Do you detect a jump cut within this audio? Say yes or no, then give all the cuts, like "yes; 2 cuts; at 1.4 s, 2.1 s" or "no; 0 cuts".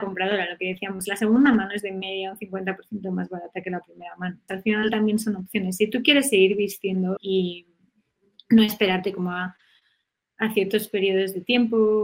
yes; 3 cuts; at 1.1 s, 4.5 s, 7.2 s